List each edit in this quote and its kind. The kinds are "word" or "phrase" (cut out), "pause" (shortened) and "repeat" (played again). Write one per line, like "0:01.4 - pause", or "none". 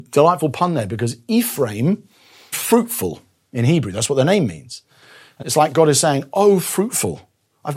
0:02.5 - word
0:05.4 - word